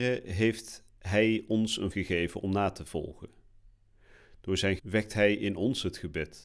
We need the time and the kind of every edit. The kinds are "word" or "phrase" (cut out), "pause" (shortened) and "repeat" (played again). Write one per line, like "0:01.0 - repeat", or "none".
0:01.9 - word
0:04.8 - word